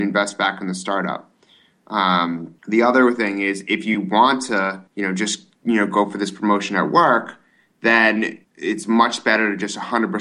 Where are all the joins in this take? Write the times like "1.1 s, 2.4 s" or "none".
2.6 s, 4.9 s, 5.6 s, 8.4 s